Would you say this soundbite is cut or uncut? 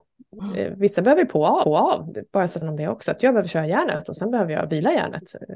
cut